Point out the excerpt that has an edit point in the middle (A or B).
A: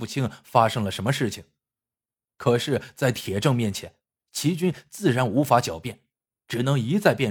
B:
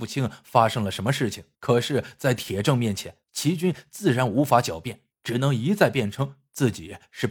B